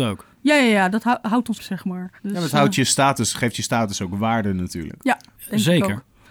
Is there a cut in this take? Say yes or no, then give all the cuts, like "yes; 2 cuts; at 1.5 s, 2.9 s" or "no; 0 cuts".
yes; 2 cuts; at 1.5 s, 2.2 s